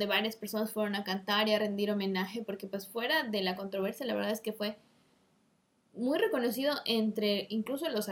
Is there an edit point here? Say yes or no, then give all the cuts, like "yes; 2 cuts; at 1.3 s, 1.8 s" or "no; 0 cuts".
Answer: no; 0 cuts